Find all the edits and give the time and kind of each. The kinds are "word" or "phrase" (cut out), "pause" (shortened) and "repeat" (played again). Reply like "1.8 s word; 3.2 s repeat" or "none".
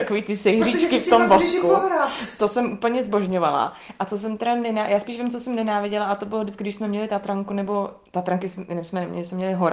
none